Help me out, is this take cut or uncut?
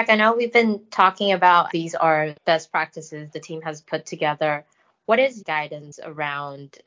cut